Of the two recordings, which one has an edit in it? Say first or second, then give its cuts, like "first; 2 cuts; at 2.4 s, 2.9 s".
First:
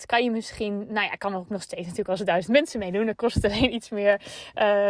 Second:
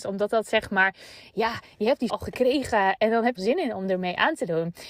second; 2 cuts; at 2.1 s, 3.4 s